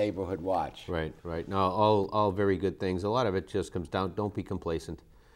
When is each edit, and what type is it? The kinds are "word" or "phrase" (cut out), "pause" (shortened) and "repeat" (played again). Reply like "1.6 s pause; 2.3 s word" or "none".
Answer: 1.2 s pause